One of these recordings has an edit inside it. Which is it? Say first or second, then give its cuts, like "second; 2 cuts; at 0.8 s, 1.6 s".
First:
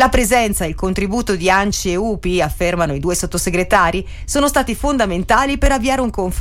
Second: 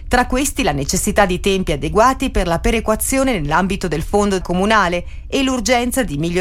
second; 1 cut; at 4.4 s